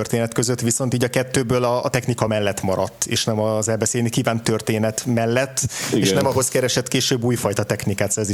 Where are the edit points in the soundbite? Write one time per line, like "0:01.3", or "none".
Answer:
none

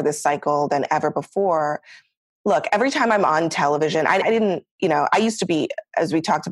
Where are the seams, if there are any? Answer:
0:04.2

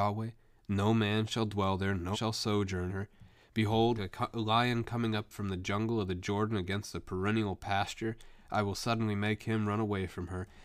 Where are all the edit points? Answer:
0:02.1
0:02.9
0:04.0

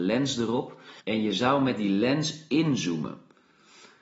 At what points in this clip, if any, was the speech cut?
0:01.0

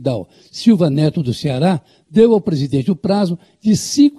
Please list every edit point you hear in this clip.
none

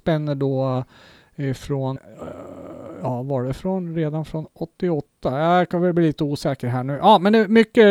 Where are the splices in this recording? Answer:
0:02.0

